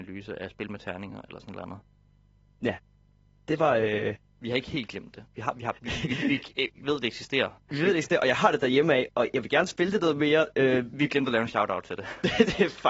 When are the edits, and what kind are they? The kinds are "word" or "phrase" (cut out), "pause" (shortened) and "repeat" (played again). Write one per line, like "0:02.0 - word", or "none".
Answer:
none